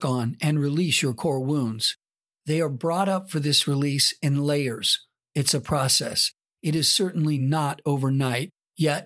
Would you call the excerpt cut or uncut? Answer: uncut